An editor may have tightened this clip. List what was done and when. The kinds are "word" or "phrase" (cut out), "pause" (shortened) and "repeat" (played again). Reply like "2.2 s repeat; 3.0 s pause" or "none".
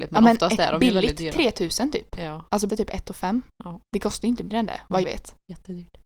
2.7 s word; 4.5 s word; 5.0 s word